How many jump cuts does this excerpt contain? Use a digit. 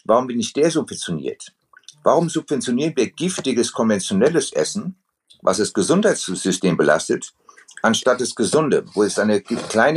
0